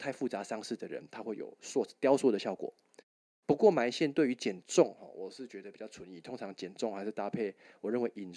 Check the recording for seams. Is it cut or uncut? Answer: uncut